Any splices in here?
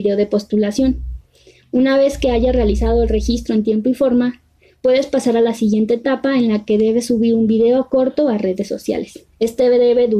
no; 0 cuts

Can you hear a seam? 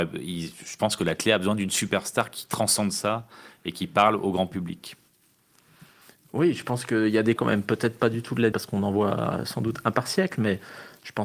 yes; 2 cuts; at 7.4 s, 8.5 s

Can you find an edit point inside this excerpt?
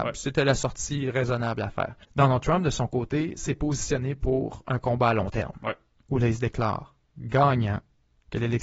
yes; 1 cut; at 2.0 s

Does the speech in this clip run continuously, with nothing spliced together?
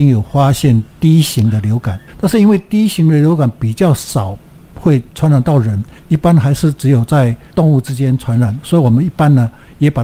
yes; 0 cuts

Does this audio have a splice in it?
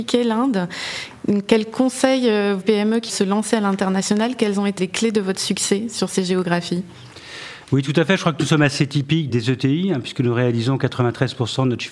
yes; 4 cuts; at 2.6 s, 3.1 s, 4.8 s, 9.3 s

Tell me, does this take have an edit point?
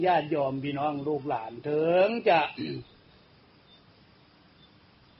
no; 0 cuts

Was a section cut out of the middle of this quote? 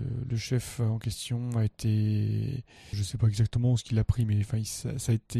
yes; 1 cut; at 2.9 s

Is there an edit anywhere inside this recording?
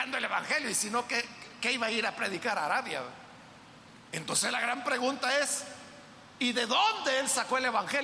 yes; 2 cuts; at 4.0 s, 6.3 s

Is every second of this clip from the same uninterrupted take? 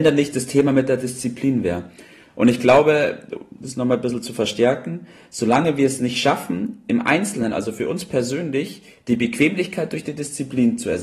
yes; 0 cuts

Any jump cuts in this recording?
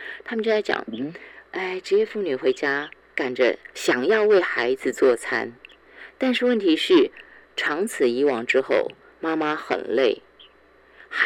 no; 0 cuts

